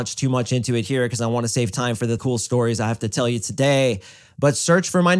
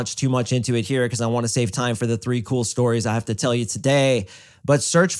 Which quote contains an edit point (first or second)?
first